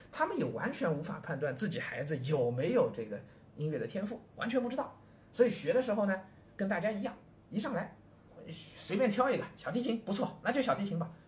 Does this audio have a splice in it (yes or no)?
no